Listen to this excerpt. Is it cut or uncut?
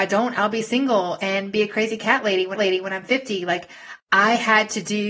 cut